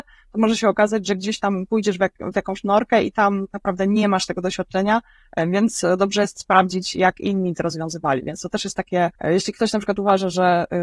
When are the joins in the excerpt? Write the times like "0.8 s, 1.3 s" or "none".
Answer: 3.5 s, 9.2 s